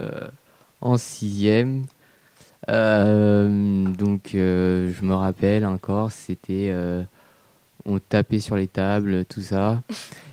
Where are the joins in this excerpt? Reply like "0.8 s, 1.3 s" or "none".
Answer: none